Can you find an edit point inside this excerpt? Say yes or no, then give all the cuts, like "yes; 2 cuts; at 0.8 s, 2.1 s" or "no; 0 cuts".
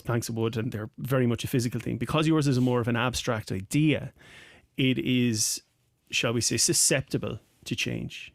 no; 0 cuts